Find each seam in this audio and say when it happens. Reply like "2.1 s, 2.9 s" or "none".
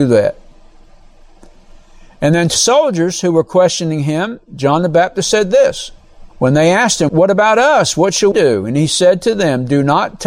2.6 s, 6.3 s, 7.1 s, 8.3 s